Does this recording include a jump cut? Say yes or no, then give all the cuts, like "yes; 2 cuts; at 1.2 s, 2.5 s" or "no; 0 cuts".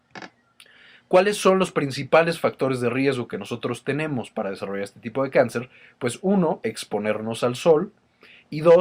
no; 0 cuts